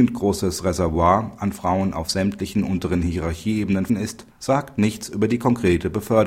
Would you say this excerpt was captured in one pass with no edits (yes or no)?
no